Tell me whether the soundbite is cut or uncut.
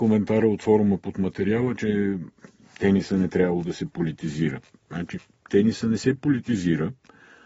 uncut